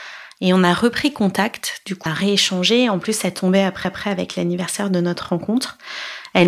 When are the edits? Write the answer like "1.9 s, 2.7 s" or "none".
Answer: 2.1 s, 3.8 s